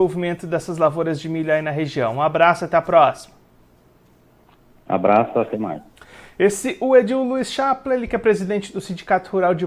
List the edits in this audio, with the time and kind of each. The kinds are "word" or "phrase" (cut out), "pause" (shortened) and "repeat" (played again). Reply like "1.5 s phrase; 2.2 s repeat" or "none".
none